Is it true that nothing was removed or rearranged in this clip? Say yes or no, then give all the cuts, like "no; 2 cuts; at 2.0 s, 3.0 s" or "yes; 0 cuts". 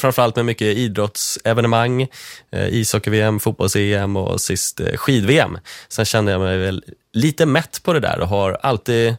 yes; 0 cuts